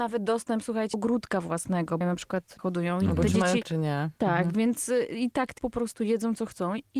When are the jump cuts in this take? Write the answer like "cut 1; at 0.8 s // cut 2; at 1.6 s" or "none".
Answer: cut 1; at 0.9 s // cut 2; at 2.0 s // cut 3; at 2.6 s // cut 4; at 3.6 s // cut 5; at 5.6 s